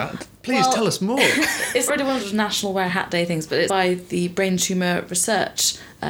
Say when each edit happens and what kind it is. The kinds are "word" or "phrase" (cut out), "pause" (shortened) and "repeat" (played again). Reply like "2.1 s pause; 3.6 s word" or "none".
1.9 s word; 2.2 s word; 3.7 s word